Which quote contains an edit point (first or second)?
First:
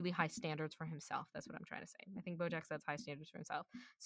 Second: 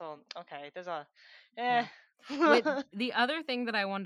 second